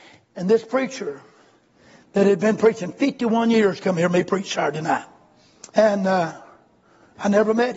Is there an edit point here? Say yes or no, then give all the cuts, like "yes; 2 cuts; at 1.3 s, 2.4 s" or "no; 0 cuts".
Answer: yes; 1 cut; at 5.7 s